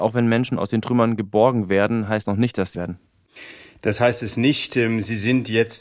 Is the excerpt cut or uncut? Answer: cut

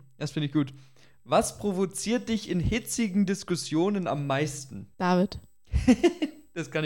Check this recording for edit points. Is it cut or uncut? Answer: cut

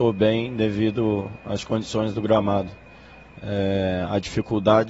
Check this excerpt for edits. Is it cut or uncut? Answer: cut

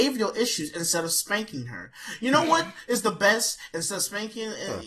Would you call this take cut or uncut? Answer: uncut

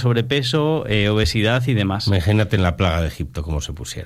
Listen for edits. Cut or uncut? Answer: uncut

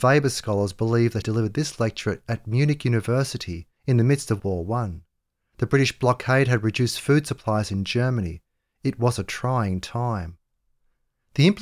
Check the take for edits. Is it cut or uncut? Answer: cut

